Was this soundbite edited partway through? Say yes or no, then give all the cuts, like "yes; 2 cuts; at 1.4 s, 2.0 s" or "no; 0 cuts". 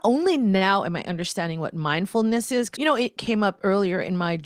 yes; 2 cuts; at 2.8 s, 3.2 s